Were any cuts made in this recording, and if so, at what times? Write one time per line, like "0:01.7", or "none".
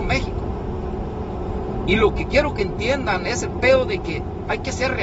none